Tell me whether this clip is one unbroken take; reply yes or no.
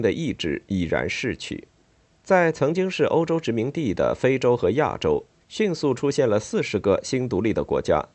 no